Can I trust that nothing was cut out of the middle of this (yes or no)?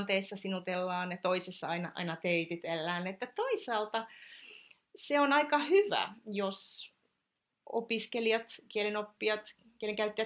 yes